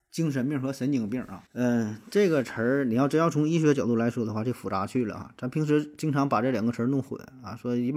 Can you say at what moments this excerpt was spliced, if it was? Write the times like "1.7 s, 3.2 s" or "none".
1.5 s